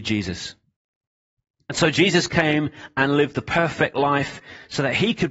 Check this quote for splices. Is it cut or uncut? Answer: uncut